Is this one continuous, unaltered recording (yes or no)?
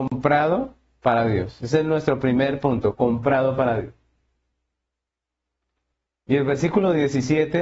yes